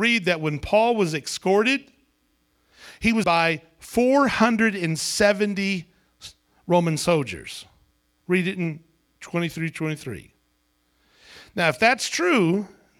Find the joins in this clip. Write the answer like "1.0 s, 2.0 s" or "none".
3.2 s